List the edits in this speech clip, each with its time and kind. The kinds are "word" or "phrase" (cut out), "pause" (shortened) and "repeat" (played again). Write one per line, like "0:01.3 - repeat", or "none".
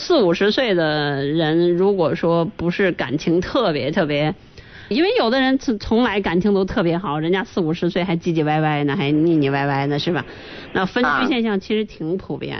0:04.9 - phrase